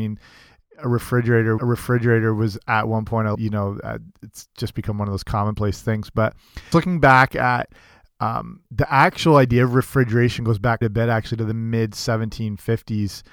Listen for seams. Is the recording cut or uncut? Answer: cut